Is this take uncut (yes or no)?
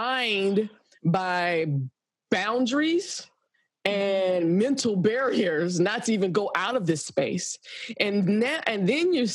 yes